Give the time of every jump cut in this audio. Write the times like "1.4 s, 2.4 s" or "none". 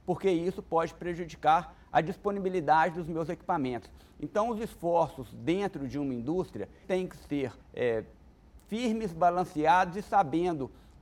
6.8 s, 7.6 s